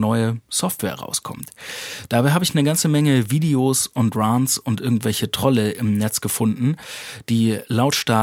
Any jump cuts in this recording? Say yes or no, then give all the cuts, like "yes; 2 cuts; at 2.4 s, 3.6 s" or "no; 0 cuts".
no; 0 cuts